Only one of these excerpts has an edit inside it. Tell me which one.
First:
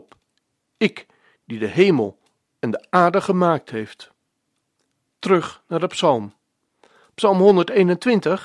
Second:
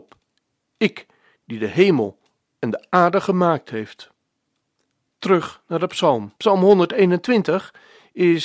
second; 1 cut; at 6.4 s

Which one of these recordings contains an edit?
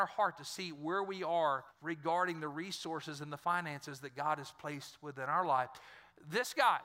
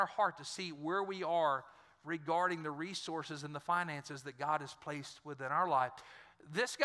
first; 1 cut; at 1.7 s

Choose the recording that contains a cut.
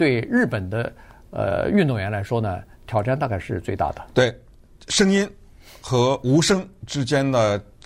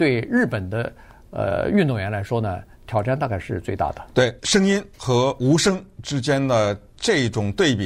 second; 2 cuts; at 4.4 s, 4.9 s

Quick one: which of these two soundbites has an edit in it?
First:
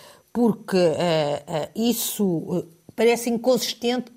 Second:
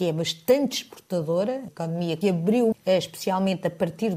second; 3 cuts; at 1.7 s, 2.2 s, 2.7 s

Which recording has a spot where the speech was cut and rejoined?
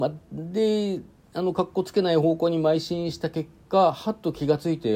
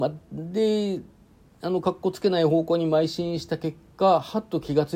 first; 1 cut; at 1.2 s

